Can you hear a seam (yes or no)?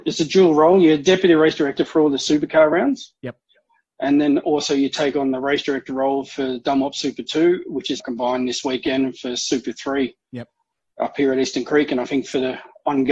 yes